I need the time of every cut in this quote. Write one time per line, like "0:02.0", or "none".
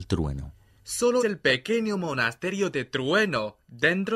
0:01.2